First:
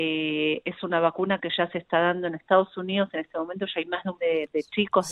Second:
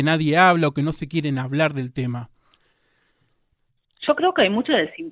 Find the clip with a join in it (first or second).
first